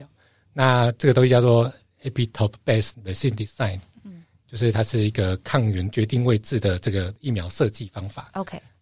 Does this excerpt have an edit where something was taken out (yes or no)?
yes